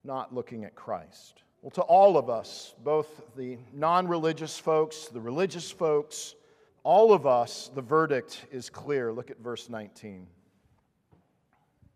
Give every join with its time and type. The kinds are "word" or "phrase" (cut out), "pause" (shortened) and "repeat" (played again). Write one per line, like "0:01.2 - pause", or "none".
0:01.5 - pause
0:06.7 - pause